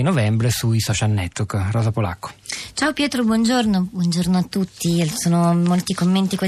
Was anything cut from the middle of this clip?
no; 0 cuts

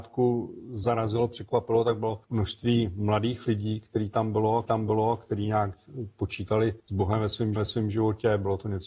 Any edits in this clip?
yes; 4 cuts; at 2.2 s, 4.7 s, 6.8 s, 7.6 s

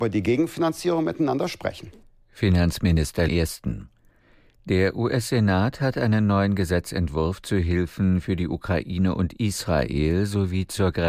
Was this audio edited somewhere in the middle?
yes; 1 cut; at 3.3 s

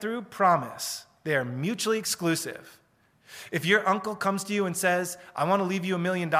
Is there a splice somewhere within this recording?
no; 0 cuts

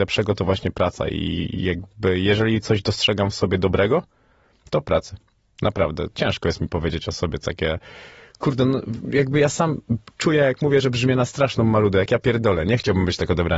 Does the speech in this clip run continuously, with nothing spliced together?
yes; 0 cuts

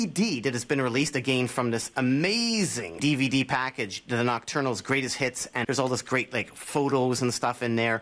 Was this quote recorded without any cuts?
no; 2 cuts; at 3.0 s, 5.6 s

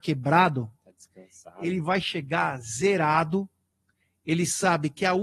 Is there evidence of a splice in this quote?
no; 0 cuts

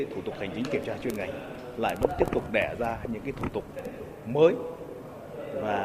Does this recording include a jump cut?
no; 0 cuts

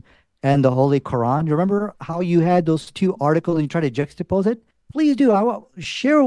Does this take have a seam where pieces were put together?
yes; 1 cut; at 4.7 s

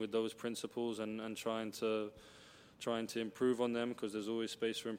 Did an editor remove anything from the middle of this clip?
no; 0 cuts

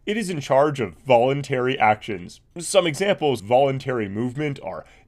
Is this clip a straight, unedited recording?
no; 2 cuts; at 2.5 s, 3.4 s

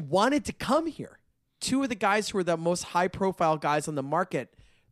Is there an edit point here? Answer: yes; 1 cut; at 1.3 s

